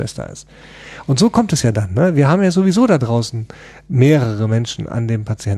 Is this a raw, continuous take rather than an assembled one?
yes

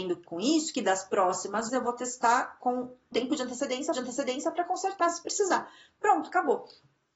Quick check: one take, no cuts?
no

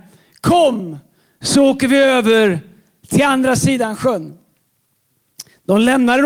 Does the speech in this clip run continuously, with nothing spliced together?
yes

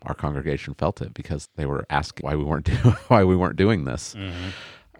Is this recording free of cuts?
no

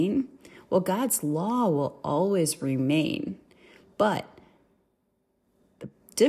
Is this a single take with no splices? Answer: yes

